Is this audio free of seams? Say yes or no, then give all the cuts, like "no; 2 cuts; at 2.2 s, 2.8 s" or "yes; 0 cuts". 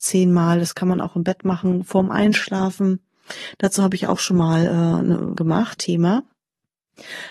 no; 2 cuts; at 5.4 s, 5.8 s